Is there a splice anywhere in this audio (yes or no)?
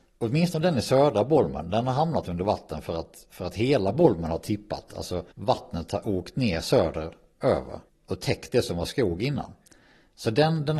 yes